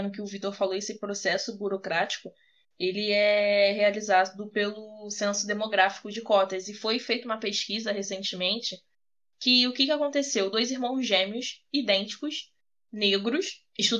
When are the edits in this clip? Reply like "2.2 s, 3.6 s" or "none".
none